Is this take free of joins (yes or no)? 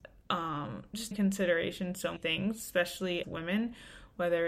no